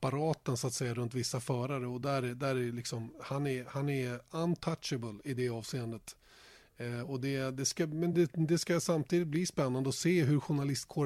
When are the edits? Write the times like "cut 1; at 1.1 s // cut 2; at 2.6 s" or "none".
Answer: none